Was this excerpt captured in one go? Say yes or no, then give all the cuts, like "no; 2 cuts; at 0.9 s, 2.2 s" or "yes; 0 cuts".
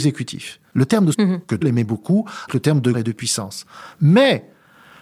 no; 4 cuts; at 1.1 s, 1.6 s, 2.5 s, 2.9 s